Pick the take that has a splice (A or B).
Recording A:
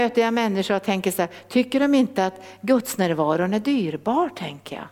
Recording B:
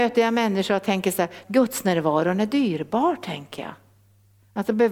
B